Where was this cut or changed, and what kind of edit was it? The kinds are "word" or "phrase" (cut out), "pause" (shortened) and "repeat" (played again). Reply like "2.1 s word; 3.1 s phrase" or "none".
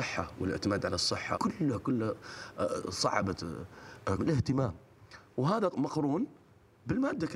1.3 s word; 1.8 s word; 4.2 s word; 5.7 s word